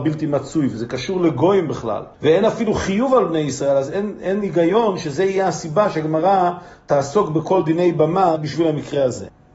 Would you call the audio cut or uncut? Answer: cut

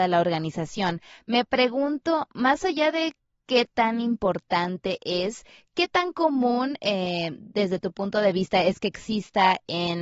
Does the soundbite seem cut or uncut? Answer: uncut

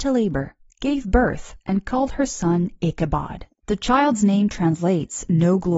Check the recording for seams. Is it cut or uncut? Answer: cut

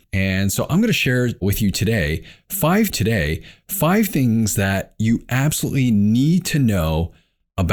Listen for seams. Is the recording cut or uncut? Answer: cut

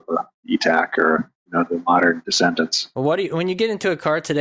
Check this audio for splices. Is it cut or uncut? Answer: uncut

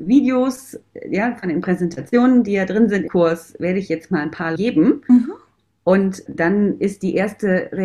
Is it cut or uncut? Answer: cut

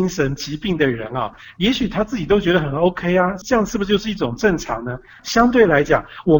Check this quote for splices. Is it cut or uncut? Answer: uncut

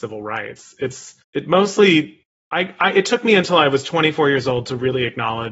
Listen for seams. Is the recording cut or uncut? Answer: cut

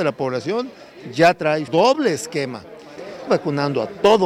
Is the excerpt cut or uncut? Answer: cut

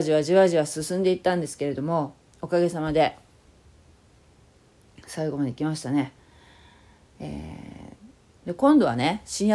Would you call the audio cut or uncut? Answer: uncut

